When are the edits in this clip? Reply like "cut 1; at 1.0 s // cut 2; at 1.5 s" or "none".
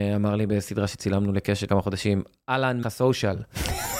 cut 1; at 1.7 s // cut 2; at 2.8 s

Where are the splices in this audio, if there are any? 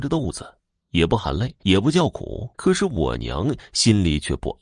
cut 1; at 1.6 s // cut 2; at 2.5 s

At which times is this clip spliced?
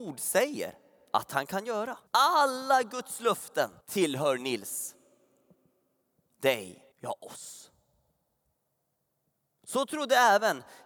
cut 1; at 2.1 s // cut 2; at 3.8 s // cut 3; at 6.9 s

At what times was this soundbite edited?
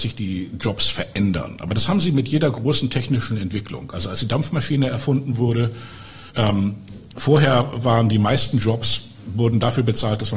cut 1; at 6.3 s

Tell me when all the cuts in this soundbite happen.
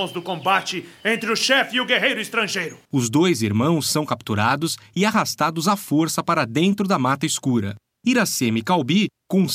cut 1; at 2.8 s

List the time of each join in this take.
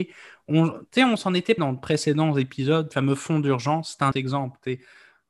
cut 1; at 1.6 s // cut 2; at 2.9 s // cut 3; at 4.1 s

